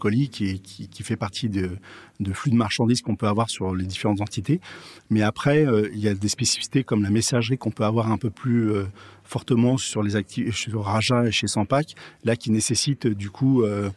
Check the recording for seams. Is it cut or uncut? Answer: uncut